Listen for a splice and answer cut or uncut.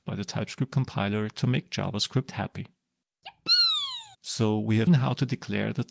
cut